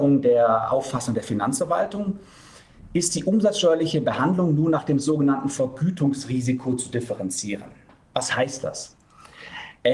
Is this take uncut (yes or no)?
yes